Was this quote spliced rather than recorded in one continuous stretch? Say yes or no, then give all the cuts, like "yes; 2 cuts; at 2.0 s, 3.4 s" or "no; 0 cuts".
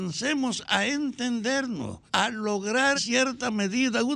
yes; 2 cuts; at 2.1 s, 2.9 s